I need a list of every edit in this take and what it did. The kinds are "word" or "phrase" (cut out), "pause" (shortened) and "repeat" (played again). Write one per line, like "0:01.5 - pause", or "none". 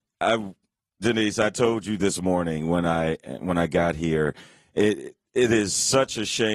none